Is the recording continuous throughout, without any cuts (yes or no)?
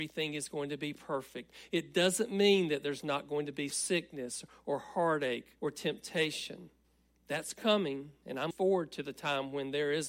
no